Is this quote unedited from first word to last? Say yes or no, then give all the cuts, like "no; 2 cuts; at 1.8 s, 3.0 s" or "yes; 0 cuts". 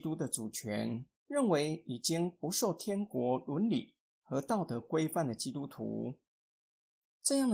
no; 1 cut; at 1.2 s